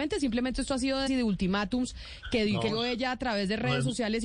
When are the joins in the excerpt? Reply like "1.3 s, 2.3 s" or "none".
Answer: 1.1 s, 2.7 s